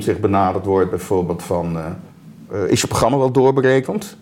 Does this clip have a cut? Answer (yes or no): no